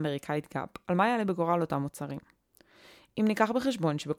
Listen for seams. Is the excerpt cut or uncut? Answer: uncut